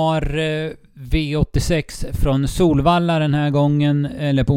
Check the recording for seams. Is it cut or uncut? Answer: uncut